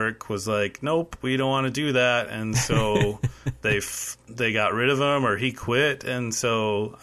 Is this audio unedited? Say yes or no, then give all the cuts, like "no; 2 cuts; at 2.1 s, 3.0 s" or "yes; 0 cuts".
yes; 0 cuts